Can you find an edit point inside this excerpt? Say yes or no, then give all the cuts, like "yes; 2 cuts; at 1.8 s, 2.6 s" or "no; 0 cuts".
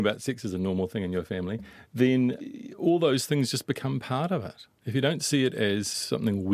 no; 0 cuts